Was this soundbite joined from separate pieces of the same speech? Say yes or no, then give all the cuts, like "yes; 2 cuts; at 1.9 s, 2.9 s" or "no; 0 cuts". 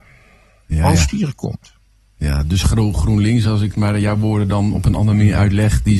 no; 0 cuts